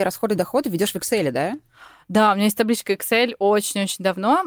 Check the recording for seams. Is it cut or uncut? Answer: uncut